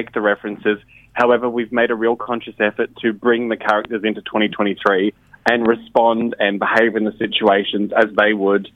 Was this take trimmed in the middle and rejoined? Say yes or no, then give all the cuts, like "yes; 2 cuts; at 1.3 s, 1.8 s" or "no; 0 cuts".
no; 0 cuts